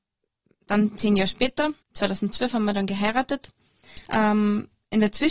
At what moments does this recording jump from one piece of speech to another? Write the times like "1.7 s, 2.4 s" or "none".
1.8 s, 4.0 s